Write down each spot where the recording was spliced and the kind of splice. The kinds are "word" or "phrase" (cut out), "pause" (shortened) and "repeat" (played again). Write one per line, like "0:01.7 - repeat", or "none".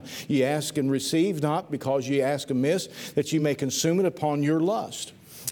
none